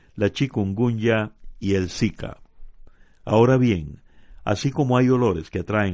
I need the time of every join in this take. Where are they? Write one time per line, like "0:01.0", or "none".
none